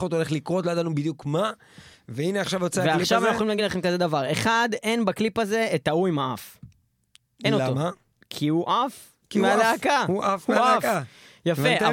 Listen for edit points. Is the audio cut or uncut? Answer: uncut